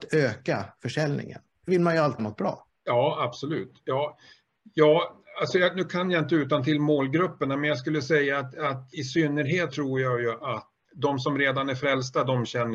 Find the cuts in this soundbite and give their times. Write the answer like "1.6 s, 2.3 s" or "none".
1.7 s, 2.2 s, 2.8 s, 8.9 s, 9.7 s, 10.9 s

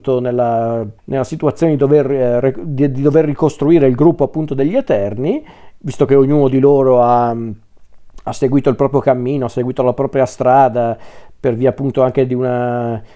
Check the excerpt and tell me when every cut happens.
1.0 s

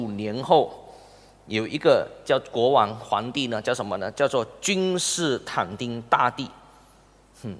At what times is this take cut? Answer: none

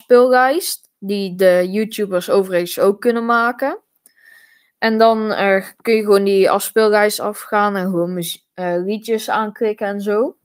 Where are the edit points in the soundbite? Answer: 1.0 s

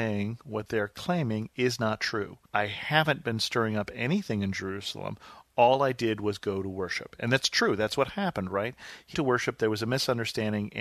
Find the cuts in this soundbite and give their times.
2.4 s, 9.1 s

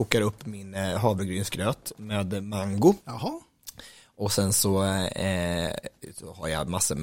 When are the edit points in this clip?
3.0 s

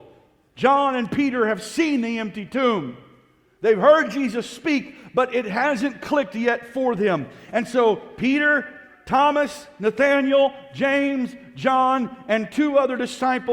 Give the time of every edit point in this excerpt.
none

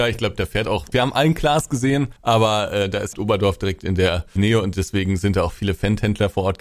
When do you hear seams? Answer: 0.9 s, 2.2 s, 3.1 s, 4.4 s

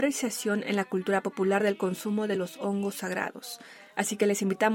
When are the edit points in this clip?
none

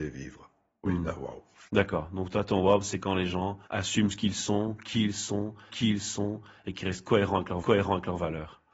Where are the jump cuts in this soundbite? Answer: 1.7 s, 3.7 s, 5.7 s, 7.6 s

